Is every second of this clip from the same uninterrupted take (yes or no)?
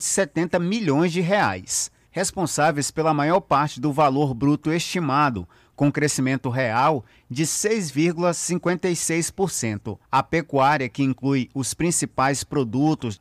no